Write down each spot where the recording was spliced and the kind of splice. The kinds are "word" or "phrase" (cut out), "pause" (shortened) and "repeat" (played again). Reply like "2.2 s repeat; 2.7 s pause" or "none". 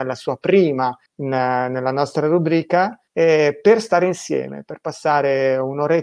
1.1 s pause; 3.1 s pause

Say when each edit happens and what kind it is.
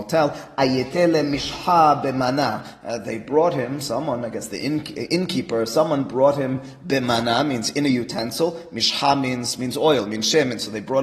none

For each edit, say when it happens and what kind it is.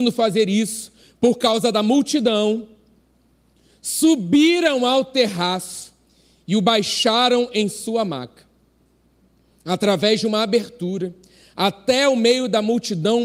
none

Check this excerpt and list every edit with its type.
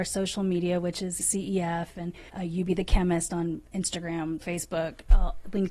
1.2 s word; 2.3 s pause; 4.4 s word

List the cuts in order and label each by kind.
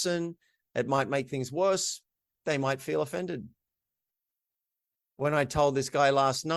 none

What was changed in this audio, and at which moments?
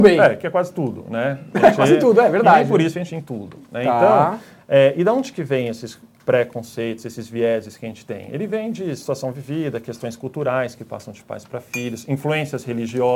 3.1 s phrase

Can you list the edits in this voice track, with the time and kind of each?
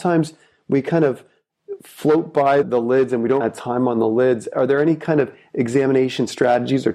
2.6 s word; 3.4 s phrase

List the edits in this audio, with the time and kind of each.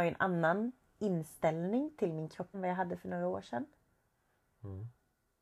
2.5 s phrase

